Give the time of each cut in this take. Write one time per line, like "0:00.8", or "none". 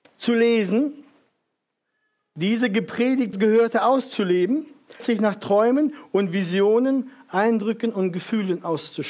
0:03.3
0:05.0